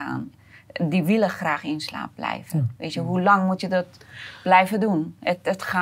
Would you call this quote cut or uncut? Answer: uncut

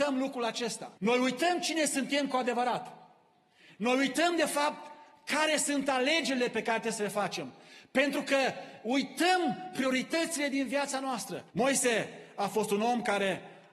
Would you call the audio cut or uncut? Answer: cut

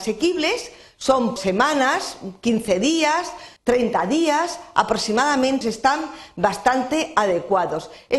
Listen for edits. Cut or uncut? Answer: cut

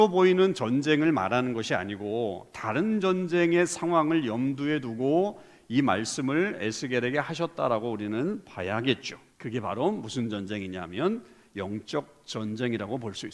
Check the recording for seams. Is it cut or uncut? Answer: cut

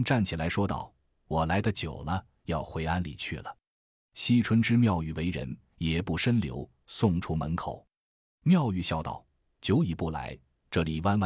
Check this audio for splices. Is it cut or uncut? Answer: uncut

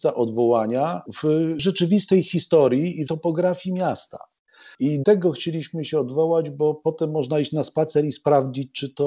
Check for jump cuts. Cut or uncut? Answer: cut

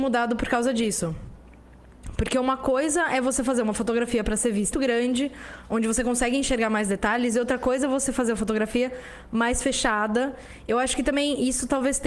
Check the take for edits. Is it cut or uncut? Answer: cut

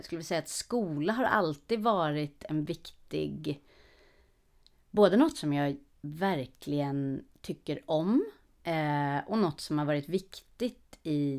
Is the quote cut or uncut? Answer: uncut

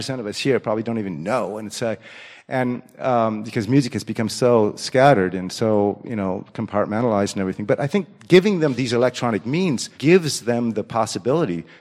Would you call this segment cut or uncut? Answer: cut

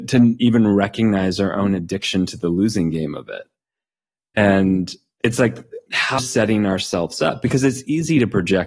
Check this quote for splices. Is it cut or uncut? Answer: cut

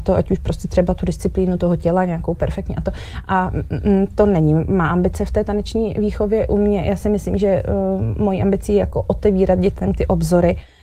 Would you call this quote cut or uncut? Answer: uncut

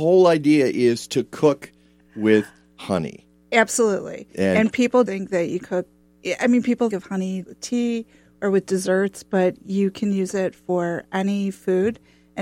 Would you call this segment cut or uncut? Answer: cut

